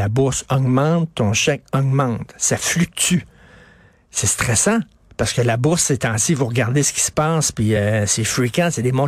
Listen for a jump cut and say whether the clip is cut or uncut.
uncut